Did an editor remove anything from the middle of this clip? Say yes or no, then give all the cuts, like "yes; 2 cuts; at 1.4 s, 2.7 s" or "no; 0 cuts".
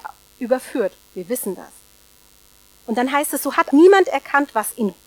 yes; 1 cut; at 3.7 s